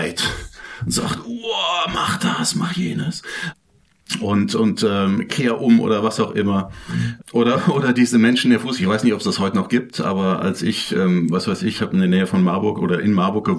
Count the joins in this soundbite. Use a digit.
1